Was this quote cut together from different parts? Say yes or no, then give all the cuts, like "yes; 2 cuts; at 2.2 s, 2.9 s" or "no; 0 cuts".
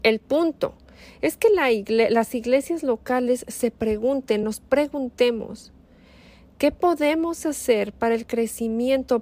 no; 0 cuts